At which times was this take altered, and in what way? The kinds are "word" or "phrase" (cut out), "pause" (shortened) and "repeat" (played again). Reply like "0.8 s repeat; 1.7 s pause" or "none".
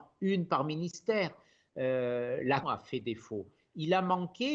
2.6 s word